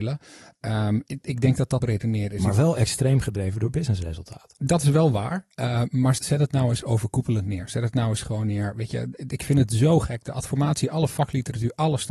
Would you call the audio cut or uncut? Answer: cut